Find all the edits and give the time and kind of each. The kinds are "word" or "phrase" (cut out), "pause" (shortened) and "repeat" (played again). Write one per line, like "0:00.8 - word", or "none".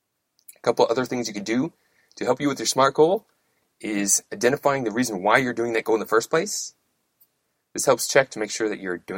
none

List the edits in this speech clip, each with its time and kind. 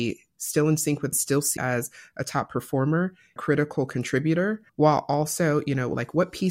0:01.1 - phrase
0:01.6 - word
0:03.4 - phrase
0:04.7 - pause

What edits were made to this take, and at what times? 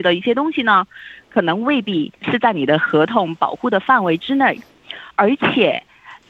0:02.1 - pause
0:05.1 - pause

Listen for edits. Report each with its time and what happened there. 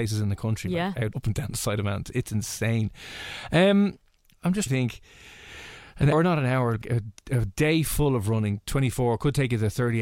0:01.1 - word
0:04.3 - word
0:04.7 - word
0:06.1 - word
0:06.8 - word

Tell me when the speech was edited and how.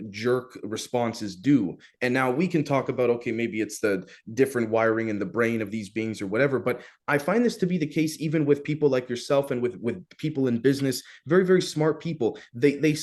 none

